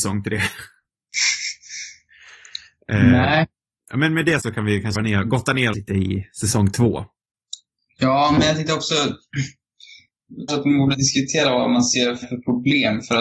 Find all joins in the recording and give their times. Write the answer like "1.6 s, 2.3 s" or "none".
4.4 s, 4.9 s, 5.7 s, 10.5 s, 10.9 s, 12.2 s